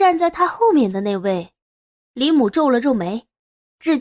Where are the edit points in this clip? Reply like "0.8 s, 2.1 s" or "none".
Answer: none